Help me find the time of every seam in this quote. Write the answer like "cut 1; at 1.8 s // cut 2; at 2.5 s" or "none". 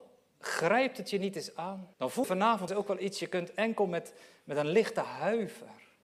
cut 1; at 1.9 s // cut 2; at 2.2 s // cut 3; at 2.7 s